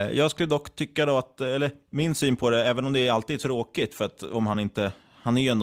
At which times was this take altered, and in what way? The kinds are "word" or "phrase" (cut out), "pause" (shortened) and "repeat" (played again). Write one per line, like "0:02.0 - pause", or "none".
none